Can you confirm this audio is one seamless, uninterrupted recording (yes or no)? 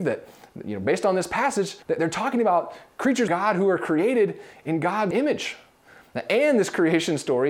no